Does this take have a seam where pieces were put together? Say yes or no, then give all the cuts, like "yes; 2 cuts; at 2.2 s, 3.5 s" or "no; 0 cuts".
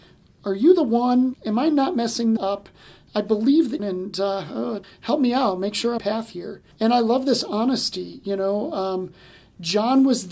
yes; 6 cuts; at 1.3 s, 2.4 s, 3.8 s, 4.8 s, 6.0 s, 6.7 s